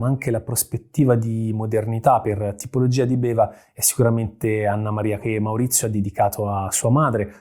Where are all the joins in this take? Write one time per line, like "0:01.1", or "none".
0:05.2